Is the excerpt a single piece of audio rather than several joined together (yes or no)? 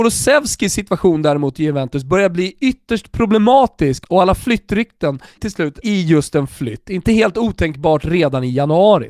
no